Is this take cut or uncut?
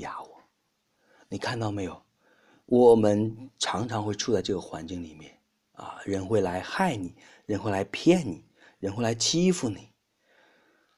uncut